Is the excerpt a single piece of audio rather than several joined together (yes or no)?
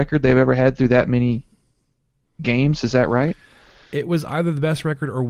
yes